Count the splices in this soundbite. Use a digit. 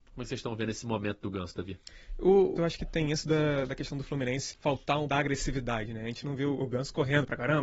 3